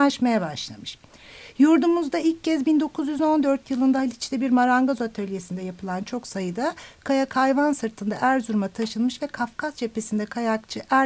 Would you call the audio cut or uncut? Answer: uncut